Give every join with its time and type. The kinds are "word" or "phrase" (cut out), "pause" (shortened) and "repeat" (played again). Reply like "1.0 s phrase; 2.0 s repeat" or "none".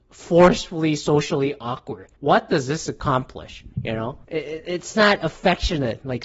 2.1 s pause; 3.7 s pause; 4.2 s pause

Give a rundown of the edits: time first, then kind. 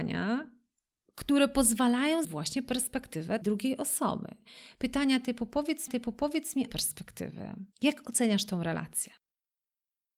2.2 s word; 3.4 s word; 5.9 s repeat; 6.7 s phrase; 7.7 s pause

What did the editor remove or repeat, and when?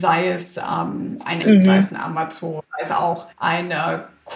1.4 s word; 2.6 s pause; 3.3 s pause

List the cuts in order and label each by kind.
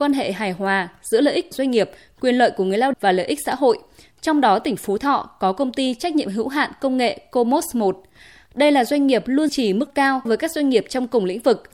1.5 s word; 2.9 s word; 9.5 s word; 9.9 s word; 10.3 s word

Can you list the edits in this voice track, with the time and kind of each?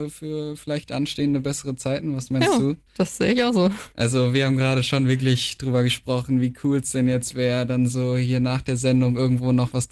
2.9 s pause

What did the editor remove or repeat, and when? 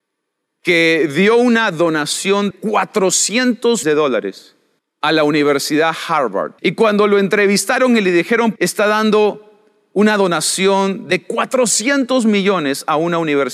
2.5 s word; 3.8 s word; 4.8 s pause; 6.6 s pause; 8.6 s phrase

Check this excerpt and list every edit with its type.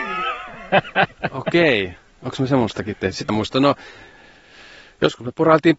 3.3 s word

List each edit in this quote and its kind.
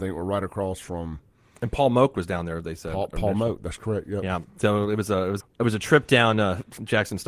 5.4 s word

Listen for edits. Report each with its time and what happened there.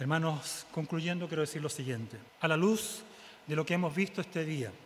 2.3 s pause

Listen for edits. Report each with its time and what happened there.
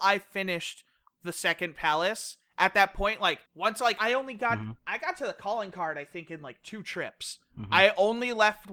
3.5 s pause; 4.0 s phrase; 4.8 s pause

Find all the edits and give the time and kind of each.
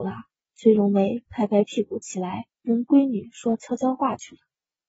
2.5 s pause

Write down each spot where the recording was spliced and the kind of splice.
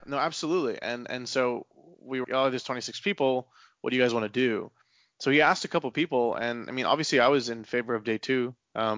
2.2 s word

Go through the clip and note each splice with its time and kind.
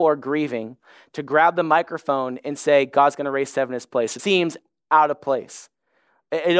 4.2 s word

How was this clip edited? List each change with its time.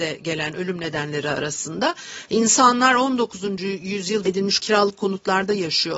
4.3 s word; 4.6 s word

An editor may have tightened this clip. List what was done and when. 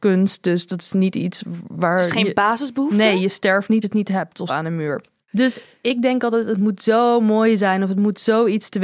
3.8 s word; 4.5 s word

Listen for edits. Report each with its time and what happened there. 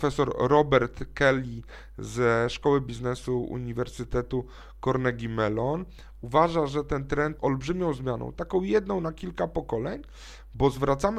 7.4 s word

